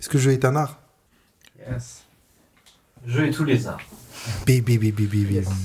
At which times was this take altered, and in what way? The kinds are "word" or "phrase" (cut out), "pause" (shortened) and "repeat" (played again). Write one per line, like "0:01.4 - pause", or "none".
0:01.1 - pause